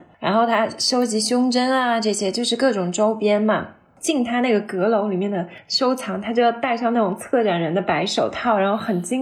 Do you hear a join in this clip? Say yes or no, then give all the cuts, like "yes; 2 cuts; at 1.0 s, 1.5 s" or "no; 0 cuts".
no; 0 cuts